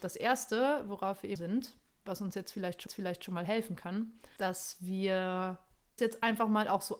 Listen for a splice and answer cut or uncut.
cut